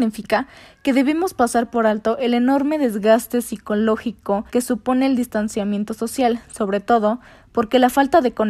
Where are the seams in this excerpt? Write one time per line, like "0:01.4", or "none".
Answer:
0:04.5